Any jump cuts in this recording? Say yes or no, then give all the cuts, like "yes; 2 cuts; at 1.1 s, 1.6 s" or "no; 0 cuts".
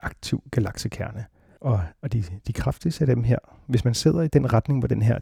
no; 0 cuts